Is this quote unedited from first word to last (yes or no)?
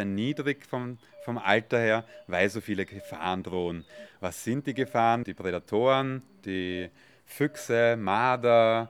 yes